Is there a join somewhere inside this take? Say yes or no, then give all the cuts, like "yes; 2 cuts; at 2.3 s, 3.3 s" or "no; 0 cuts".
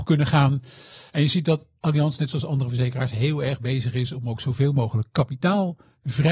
yes; 1 cut; at 1.1 s